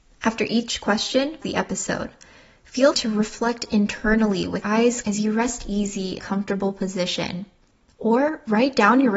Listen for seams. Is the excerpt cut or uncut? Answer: cut